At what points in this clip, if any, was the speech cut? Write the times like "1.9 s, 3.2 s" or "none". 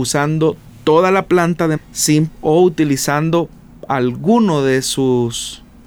1.8 s, 2.3 s